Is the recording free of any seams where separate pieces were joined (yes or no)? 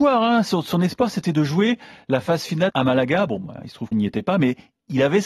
no